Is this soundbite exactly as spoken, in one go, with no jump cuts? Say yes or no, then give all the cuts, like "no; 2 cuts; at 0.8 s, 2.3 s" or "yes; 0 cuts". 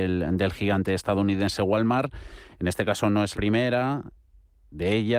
no; 1 cut; at 3.3 s